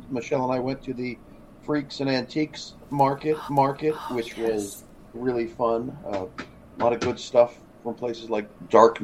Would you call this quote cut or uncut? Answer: cut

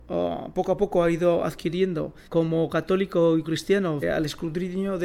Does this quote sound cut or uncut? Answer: cut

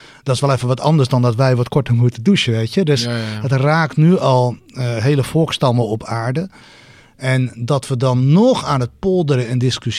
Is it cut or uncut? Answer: uncut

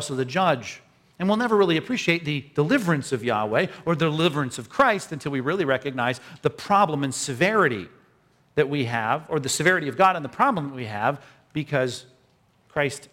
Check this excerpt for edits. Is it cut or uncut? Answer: uncut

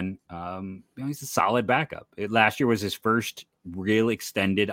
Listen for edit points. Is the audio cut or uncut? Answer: uncut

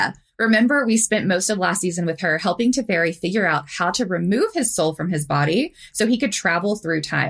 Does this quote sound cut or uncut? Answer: uncut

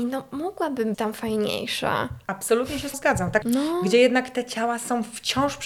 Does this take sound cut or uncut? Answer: cut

